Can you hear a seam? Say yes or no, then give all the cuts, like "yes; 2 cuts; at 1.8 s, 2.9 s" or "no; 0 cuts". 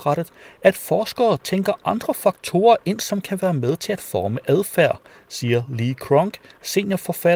no; 0 cuts